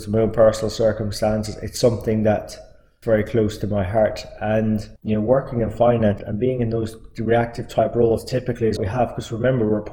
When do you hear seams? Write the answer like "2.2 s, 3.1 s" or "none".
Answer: 3.0 s, 5.0 s, 6.2 s, 8.8 s